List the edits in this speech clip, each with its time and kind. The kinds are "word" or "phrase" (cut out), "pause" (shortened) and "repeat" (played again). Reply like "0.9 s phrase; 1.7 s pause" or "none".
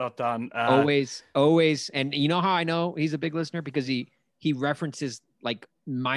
none